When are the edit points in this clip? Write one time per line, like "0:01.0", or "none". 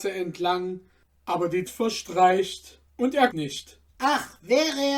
0:01.7
0:02.9
0:03.3
0:03.9